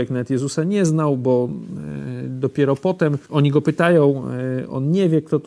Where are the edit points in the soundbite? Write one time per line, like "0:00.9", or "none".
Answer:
0:03.2